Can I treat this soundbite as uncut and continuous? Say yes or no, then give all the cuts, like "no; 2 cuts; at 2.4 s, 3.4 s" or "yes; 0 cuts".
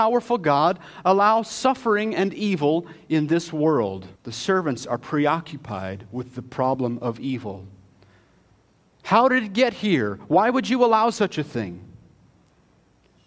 no; 1 cut; at 4.2 s